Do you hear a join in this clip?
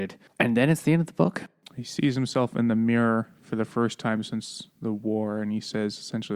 no; 0 cuts

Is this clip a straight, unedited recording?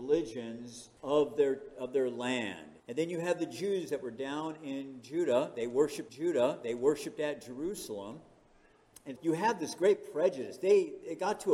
no; 4 cuts; at 1.0 s, 2.8 s, 6.1 s, 9.2 s

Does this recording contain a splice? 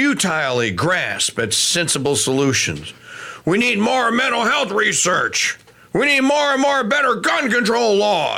no; 0 cuts

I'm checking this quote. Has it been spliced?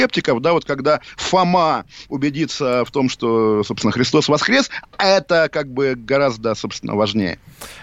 no; 0 cuts

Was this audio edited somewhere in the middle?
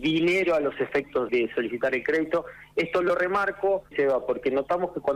yes; 2 cuts; at 1.3 s, 3.9 s

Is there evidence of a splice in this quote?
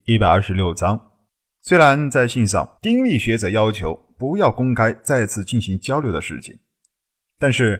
yes; 2 cuts; at 1.3 s, 2.8 s

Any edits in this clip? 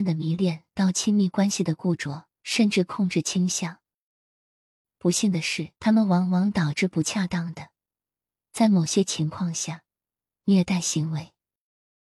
yes; 2 cuts; at 2.3 s, 5.8 s

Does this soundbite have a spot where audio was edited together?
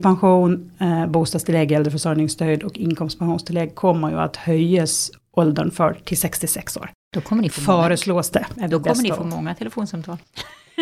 no; 0 cuts

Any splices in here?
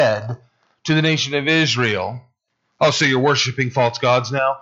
no; 0 cuts

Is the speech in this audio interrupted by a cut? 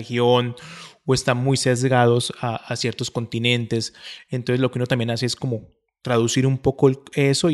no; 0 cuts

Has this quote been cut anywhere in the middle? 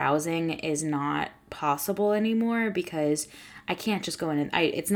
no; 0 cuts

